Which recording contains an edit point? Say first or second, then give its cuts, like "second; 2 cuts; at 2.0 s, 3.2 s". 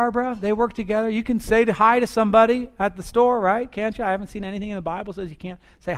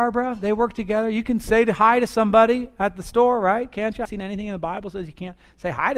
second; 1 cut; at 4.0 s